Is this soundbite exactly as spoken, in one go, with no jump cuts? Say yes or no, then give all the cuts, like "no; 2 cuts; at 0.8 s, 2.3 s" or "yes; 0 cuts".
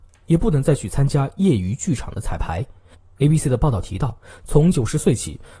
yes; 0 cuts